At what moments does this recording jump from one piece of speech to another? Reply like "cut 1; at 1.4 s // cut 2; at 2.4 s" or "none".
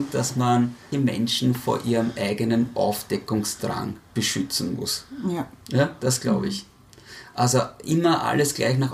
cut 1; at 0.9 s // cut 2; at 5.6 s

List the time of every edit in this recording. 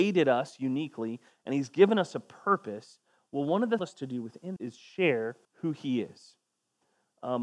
cut 1; at 3.8 s // cut 2; at 4.6 s // cut 3; at 5.4 s

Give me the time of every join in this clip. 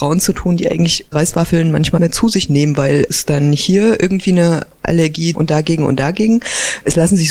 cut 1; at 1.1 s // cut 2; at 2.0 s // cut 3; at 3.1 s // cut 4; at 5.3 s

